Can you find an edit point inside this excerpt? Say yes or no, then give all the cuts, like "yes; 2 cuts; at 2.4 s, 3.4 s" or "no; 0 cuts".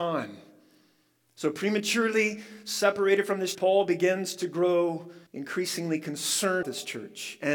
yes; 3 cuts; at 3.5 s, 5.3 s, 6.6 s